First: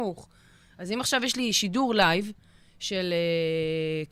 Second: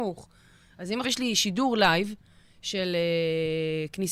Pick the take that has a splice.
second; 1 cut; at 1.0 s

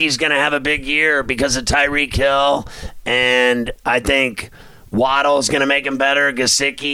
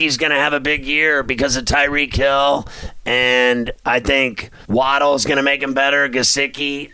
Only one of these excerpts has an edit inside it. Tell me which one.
second; 1 cut; at 4.6 s

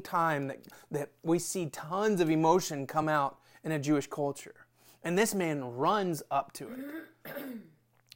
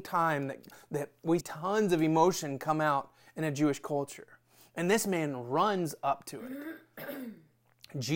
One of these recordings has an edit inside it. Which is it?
second; 1 cut; at 1.4 s

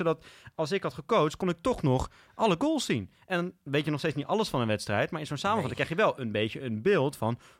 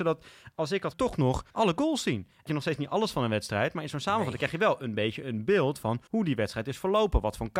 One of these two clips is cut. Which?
second; 4 cuts; at 0.9 s, 1.5 s, 2.5 s, 6.1 s

